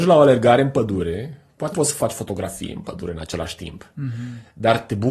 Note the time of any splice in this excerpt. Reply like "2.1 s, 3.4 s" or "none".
1.7 s